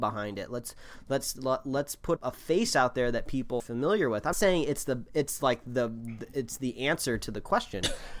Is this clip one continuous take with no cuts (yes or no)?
no